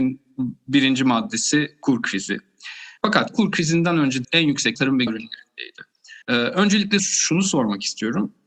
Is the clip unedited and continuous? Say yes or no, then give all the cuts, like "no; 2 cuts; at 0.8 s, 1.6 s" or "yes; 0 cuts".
no; 6 cuts; at 3.0 s, 4.2 s, 4.7 s, 5.1 s, 6.2 s, 7.0 s